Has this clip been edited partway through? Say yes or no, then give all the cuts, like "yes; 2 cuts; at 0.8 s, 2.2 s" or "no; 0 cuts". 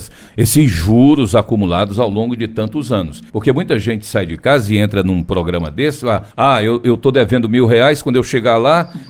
yes; 2 cuts; at 3.3 s, 6.3 s